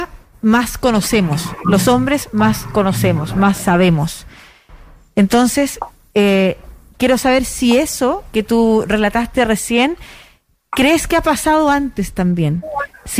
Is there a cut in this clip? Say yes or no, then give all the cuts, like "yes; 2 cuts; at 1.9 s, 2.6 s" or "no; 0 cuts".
no; 0 cuts